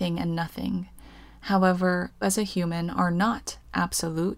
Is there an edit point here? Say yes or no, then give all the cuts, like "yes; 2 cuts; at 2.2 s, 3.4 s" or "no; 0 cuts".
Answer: yes; 1 cut; at 2.2 s